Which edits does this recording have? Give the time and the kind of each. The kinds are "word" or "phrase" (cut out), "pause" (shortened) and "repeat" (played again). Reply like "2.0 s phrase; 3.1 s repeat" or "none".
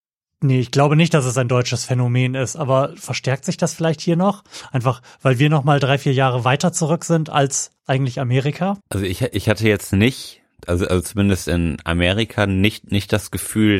7.8 s pause; 8.8 s pause